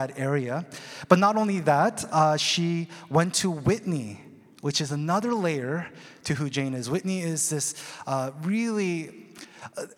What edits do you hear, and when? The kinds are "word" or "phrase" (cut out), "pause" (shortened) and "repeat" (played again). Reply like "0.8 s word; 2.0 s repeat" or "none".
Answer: none